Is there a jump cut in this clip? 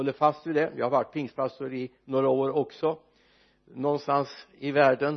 no; 0 cuts

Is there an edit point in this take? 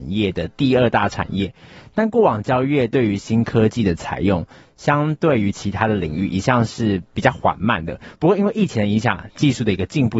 no; 0 cuts

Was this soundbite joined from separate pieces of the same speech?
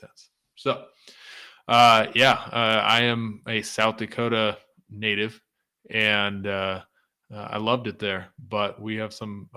no; 0 cuts

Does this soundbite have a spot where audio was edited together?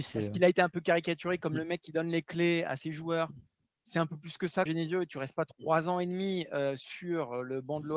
yes; 1 cut; at 4.7 s

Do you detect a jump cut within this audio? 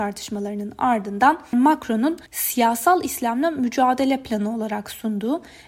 yes; 2 cuts; at 1.5 s, 2.3 s

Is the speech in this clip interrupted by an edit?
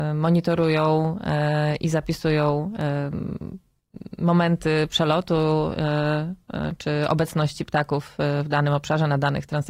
no; 0 cuts

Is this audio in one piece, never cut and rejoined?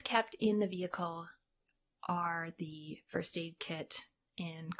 yes; 0 cuts

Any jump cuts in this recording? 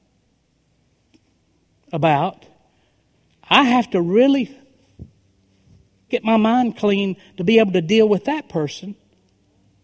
no; 0 cuts

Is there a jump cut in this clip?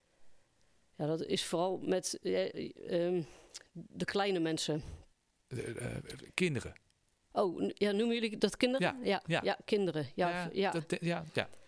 no; 0 cuts

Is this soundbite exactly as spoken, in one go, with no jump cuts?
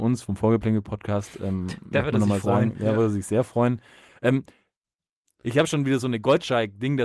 yes; 0 cuts

